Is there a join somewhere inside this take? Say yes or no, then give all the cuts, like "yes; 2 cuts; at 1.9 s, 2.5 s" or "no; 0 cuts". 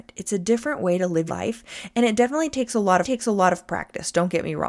yes; 2 cuts; at 1.3 s, 3.0 s